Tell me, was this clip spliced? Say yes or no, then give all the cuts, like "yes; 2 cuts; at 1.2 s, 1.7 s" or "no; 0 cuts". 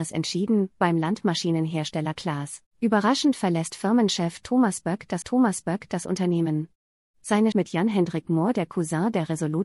yes; 3 cuts; at 2.7 s, 5.2 s, 7.5 s